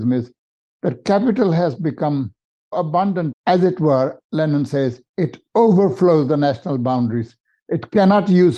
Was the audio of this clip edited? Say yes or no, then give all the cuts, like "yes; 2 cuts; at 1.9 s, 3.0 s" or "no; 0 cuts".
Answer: yes; 3 cuts; at 2.7 s, 3.3 s, 5.1 s